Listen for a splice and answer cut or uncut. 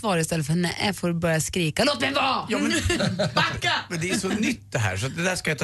uncut